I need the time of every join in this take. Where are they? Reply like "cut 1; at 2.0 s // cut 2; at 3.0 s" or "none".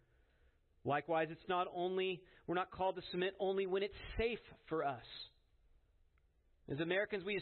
none

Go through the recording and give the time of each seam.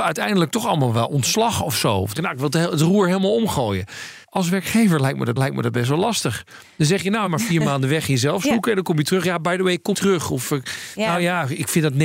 cut 1; at 2.2 s // cut 2; at 4.2 s // cut 3; at 5.4 s // cut 4; at 7.3 s // cut 5; at 9.9 s

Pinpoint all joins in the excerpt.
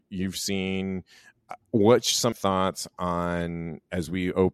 cut 1; at 1.6 s // cut 2; at 2.3 s

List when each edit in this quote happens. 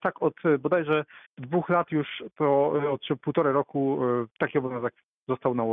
cut 1; at 1.3 s // cut 2; at 4.3 s

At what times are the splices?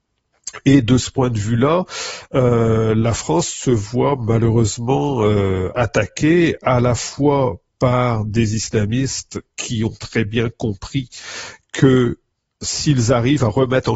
none

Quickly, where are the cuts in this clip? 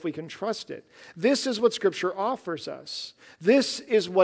none

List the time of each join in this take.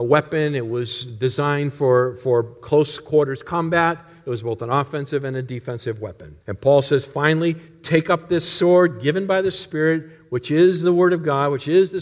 cut 1; at 6.4 s

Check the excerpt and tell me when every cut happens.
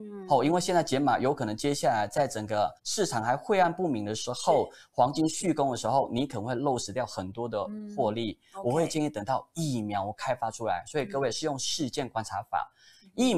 cut 1; at 2.8 s

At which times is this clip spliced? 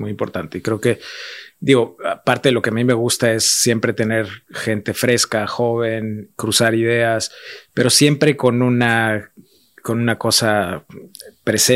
none

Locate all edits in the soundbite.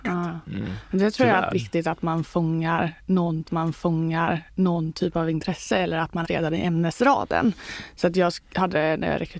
cut 1; at 1.5 s // cut 2; at 3.4 s // cut 3; at 6.2 s // cut 4; at 8.5 s

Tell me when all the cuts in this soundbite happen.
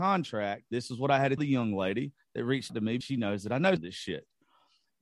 cut 1; at 1.4 s // cut 2; at 2.7 s // cut 3; at 3.0 s // cut 4; at 3.8 s

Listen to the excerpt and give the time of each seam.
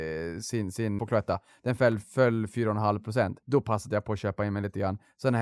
cut 1; at 1.0 s // cut 2; at 3.4 s

